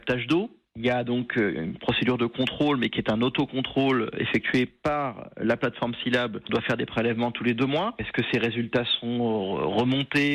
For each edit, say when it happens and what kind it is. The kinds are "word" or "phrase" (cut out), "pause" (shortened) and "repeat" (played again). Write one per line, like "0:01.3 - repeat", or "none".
0:06.5 - word